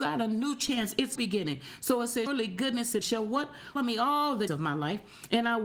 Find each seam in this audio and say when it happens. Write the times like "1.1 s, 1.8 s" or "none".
1.2 s, 2.3 s, 3.0 s, 3.8 s, 4.5 s